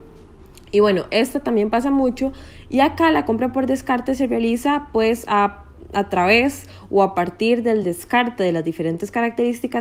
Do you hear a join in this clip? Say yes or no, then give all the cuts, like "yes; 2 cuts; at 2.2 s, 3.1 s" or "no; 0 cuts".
no; 0 cuts